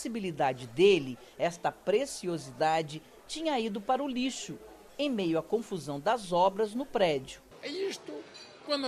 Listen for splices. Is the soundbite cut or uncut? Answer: uncut